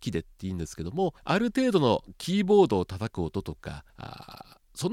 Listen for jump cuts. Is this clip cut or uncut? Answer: cut